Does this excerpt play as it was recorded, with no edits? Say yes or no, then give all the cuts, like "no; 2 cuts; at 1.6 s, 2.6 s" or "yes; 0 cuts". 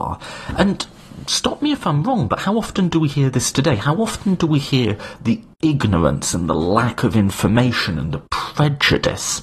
yes; 0 cuts